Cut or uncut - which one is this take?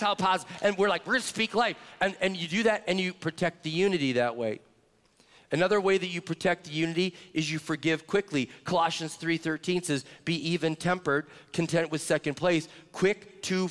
uncut